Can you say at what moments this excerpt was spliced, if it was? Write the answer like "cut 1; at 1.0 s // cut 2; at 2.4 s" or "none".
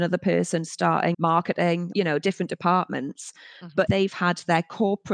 cut 1; at 1.1 s // cut 2; at 1.9 s // cut 3; at 3.9 s